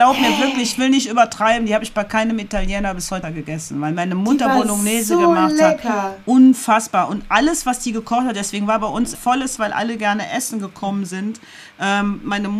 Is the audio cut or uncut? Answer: cut